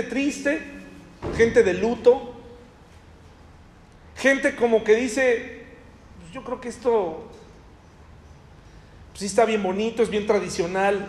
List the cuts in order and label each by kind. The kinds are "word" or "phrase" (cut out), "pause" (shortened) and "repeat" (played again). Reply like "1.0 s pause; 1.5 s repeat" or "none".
none